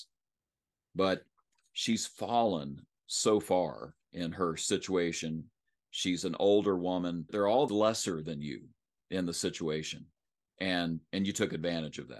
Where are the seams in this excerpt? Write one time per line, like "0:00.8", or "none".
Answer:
0:07.3
0:07.7